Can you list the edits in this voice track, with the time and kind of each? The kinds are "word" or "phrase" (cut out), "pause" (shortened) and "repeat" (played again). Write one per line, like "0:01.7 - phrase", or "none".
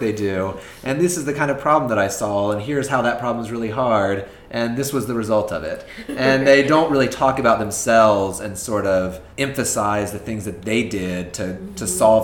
0:09.3 - pause